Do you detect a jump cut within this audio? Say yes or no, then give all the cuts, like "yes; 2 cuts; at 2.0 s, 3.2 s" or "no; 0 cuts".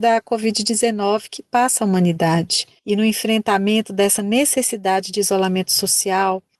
no; 0 cuts